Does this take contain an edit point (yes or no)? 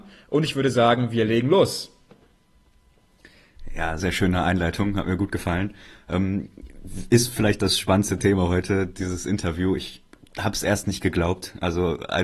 yes